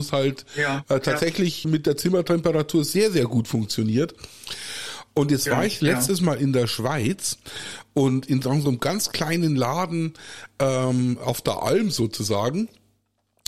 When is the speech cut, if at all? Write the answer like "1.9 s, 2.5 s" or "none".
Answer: 1.6 s